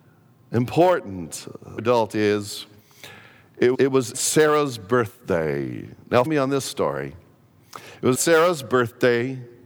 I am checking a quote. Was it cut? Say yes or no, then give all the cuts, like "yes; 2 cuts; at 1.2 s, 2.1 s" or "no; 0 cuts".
yes; 5 cuts; at 1.8 s, 3.7 s, 4.1 s, 6.3 s, 8.1 s